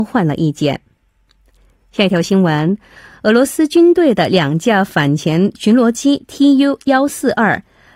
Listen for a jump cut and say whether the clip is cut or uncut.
uncut